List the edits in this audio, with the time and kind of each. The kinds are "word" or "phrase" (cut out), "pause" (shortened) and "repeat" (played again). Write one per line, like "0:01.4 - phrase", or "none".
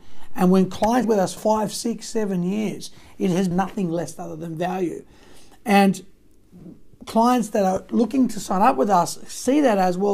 0:01.0 - word
0:01.4 - phrase
0:03.5 - phrase